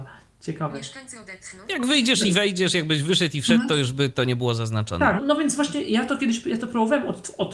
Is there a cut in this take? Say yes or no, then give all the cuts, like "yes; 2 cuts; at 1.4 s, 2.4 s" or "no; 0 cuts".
yes; 1 cut; at 5.2 s